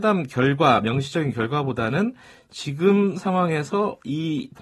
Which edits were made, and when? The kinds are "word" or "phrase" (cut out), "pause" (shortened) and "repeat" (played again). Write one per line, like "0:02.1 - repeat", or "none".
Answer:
none